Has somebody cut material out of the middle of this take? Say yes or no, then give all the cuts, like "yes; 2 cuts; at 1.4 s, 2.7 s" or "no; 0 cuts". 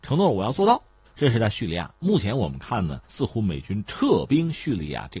yes; 1 cut; at 3.0 s